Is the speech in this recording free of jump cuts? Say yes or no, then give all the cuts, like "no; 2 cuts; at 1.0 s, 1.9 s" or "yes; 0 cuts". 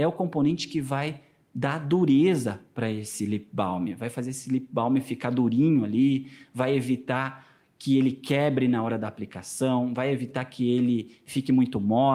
yes; 0 cuts